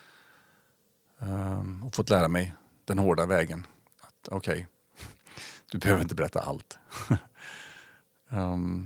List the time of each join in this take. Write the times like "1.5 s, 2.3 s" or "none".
none